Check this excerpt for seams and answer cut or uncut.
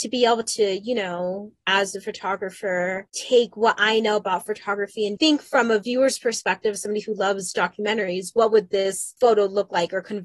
cut